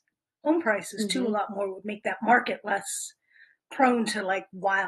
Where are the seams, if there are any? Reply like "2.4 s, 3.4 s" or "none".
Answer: none